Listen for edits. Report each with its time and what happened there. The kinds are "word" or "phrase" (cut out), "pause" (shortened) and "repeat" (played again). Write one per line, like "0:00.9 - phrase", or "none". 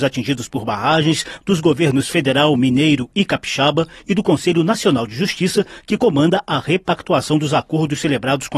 none